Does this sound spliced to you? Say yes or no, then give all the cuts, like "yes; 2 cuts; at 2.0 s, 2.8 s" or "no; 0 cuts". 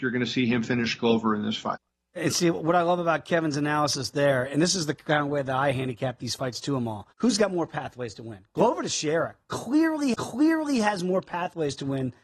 yes; 2 cuts; at 7.1 s, 10.1 s